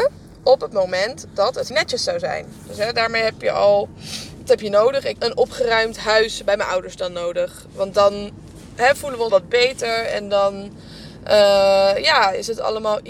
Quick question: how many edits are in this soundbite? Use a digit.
4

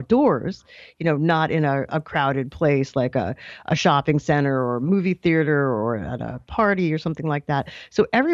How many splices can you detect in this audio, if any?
0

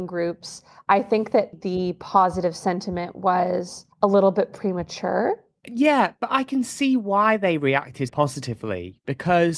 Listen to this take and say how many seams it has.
3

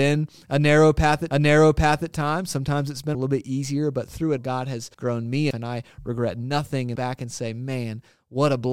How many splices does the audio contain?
6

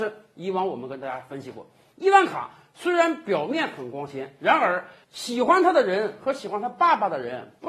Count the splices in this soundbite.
0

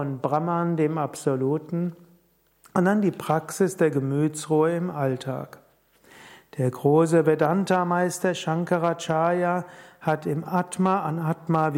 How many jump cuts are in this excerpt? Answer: 0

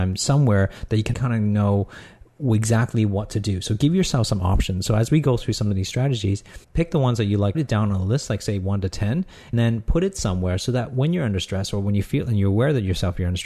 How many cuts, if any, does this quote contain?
4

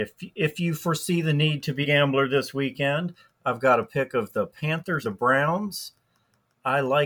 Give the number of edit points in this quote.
2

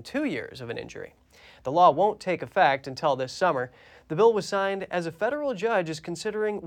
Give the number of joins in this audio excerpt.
0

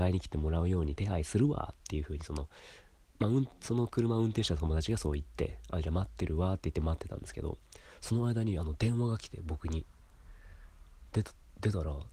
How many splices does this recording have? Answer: 0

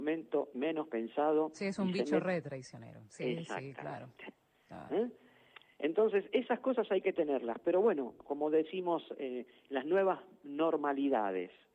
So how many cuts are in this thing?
0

